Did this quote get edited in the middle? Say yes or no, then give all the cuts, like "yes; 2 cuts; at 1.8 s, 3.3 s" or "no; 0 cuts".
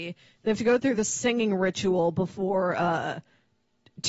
no; 0 cuts